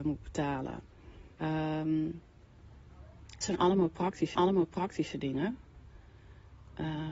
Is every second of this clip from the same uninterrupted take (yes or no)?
no